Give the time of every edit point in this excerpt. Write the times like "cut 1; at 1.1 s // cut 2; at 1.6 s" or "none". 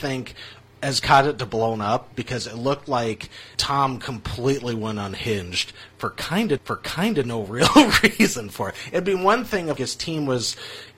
cut 1; at 3.5 s // cut 2; at 6.6 s // cut 3; at 9.8 s